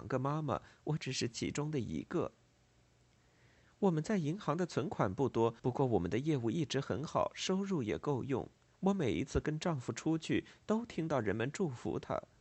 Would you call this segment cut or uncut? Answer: cut